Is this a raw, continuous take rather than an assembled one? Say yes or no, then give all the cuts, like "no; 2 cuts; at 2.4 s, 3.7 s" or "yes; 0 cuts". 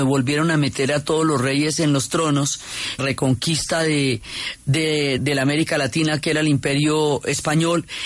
no; 2 cuts; at 3.0 s, 5.2 s